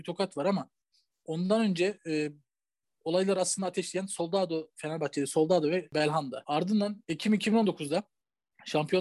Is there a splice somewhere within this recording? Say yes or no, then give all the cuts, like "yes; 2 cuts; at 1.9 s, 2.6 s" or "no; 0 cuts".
no; 0 cuts